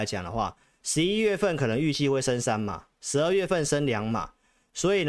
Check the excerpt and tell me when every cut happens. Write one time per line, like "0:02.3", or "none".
none